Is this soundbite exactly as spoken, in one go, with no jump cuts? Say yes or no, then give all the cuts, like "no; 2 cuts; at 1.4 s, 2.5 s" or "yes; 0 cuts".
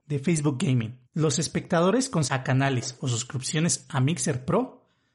no; 2 cuts; at 1.1 s, 2.3 s